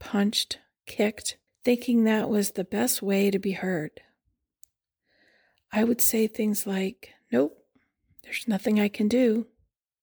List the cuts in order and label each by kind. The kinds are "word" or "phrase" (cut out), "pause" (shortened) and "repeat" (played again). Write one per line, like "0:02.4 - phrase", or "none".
0:01.5 - pause